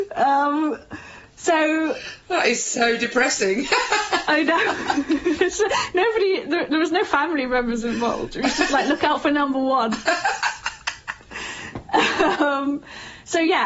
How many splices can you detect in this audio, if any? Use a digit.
0